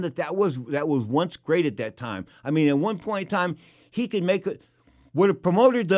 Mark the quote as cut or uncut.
uncut